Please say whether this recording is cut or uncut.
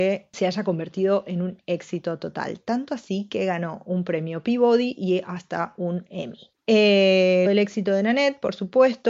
cut